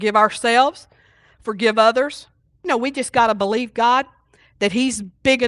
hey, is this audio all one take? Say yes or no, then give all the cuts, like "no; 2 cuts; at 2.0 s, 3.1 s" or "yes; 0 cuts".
yes; 0 cuts